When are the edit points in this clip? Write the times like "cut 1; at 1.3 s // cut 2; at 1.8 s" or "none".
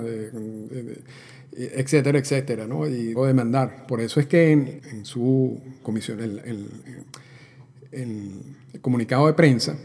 cut 1; at 3.1 s // cut 2; at 4.8 s // cut 3; at 5.8 s